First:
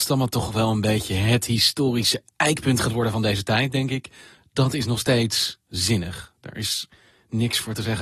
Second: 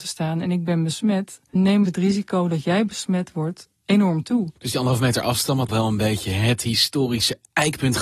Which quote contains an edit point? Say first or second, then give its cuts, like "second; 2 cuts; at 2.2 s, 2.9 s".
second; 4 cuts; at 1.6 s, 3.8 s, 4.6 s, 5.7 s